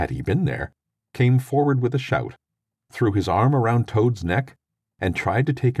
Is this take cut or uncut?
uncut